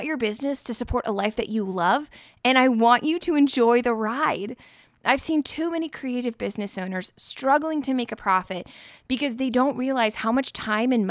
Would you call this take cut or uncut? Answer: uncut